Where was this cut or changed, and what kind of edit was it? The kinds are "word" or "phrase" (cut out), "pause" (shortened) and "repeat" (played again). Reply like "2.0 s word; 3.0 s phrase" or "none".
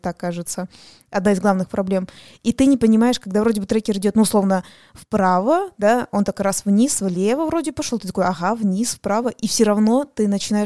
none